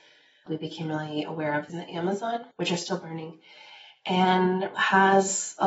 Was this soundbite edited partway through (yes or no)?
yes